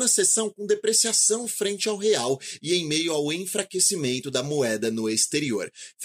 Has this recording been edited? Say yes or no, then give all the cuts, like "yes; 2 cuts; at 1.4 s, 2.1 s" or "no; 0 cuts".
no; 0 cuts